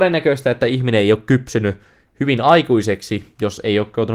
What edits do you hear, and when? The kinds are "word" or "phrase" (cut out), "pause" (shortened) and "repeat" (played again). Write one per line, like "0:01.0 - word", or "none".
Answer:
none